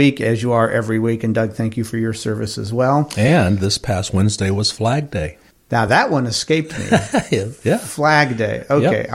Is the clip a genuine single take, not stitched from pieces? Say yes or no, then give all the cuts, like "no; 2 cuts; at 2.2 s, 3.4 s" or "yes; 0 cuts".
yes; 0 cuts